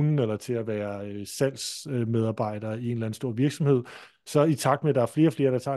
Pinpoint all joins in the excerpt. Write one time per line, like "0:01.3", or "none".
none